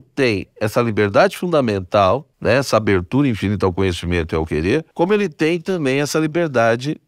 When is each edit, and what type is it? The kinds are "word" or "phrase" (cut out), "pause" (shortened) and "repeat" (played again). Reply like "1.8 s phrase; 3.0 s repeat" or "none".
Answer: 2.3 s pause; 4.9 s pause